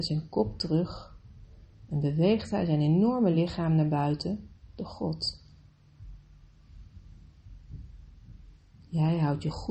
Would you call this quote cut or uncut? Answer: uncut